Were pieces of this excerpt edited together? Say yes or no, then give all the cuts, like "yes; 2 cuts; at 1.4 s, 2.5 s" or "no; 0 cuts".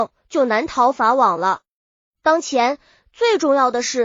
no; 0 cuts